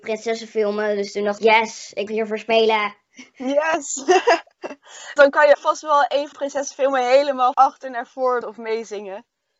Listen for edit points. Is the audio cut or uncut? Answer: cut